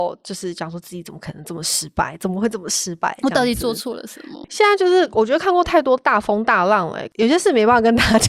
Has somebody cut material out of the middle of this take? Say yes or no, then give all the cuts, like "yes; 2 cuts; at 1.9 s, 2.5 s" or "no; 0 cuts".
no; 0 cuts